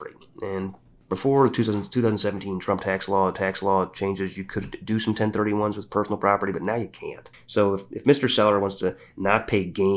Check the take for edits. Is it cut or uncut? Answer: cut